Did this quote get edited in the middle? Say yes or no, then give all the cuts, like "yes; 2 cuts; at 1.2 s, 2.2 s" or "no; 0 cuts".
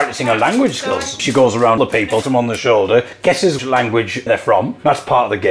yes; 5 cuts; at 1.2 s, 1.8 s, 2.2 s, 3.6 s, 4.3 s